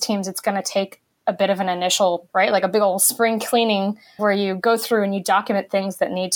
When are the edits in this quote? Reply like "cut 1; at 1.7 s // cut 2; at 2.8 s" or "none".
cut 1; at 2.3 s // cut 2; at 4.2 s